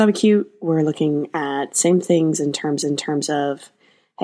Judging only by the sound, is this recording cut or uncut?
cut